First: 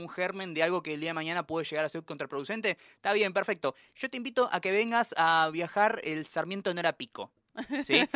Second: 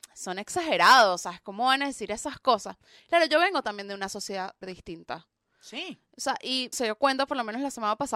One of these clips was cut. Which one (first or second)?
second